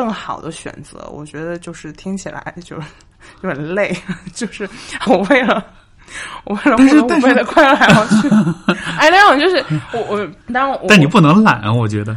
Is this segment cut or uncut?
cut